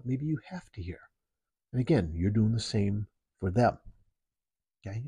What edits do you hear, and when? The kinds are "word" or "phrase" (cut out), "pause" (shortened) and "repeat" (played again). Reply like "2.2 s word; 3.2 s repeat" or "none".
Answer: none